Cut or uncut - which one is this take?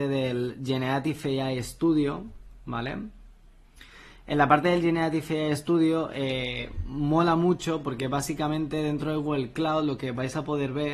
uncut